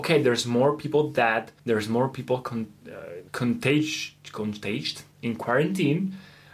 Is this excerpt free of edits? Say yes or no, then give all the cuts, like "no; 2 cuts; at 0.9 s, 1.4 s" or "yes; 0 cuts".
no; 3 cuts; at 1.6 s, 3.3 s, 5.1 s